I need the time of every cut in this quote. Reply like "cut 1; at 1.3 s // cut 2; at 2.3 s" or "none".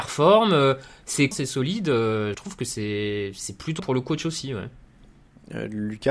cut 1; at 1.3 s // cut 2; at 2.3 s // cut 3; at 3.8 s